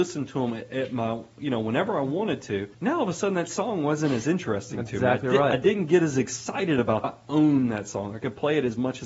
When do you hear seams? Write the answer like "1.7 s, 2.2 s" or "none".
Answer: 2.7 s, 7.0 s